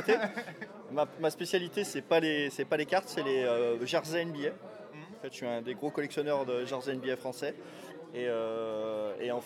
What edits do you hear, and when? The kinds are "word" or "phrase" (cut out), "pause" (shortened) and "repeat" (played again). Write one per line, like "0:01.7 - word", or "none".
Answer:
none